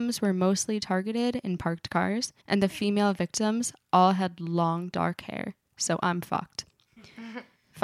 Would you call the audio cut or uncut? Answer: cut